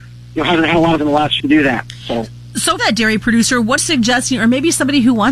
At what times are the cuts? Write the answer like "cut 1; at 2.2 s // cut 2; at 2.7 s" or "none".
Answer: cut 1; at 1.0 s // cut 2; at 1.4 s // cut 3; at 2.8 s // cut 4; at 3.8 s